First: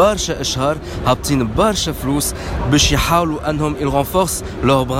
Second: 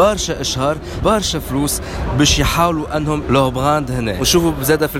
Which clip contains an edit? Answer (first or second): second